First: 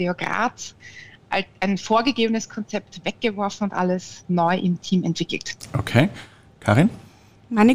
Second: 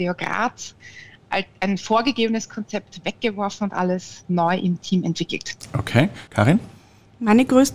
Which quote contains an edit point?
second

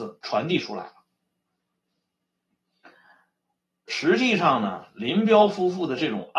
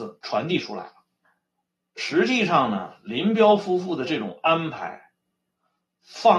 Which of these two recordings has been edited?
second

